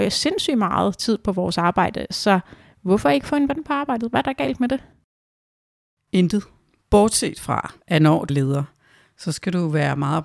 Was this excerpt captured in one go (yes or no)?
no